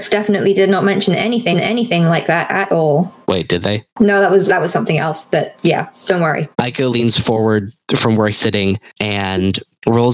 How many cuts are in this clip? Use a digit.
5